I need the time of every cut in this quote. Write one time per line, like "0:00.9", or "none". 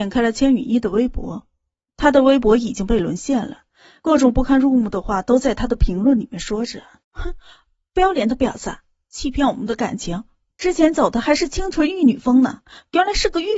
0:07.0